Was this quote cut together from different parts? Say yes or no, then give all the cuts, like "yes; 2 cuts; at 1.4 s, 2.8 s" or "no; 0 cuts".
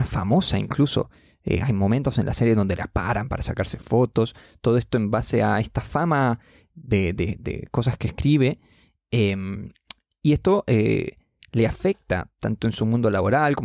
no; 0 cuts